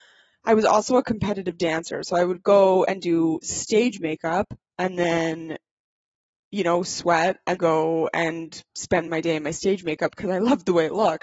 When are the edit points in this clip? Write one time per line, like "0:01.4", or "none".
0:07.6
0:09.1